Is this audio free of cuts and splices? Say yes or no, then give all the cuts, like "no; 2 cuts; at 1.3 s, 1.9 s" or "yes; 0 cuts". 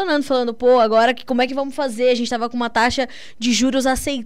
yes; 0 cuts